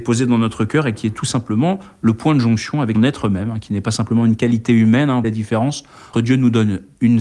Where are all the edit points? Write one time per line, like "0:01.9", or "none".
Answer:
0:03.0
0:05.2
0:06.1